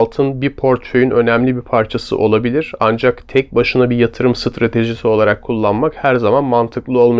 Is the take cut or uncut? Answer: uncut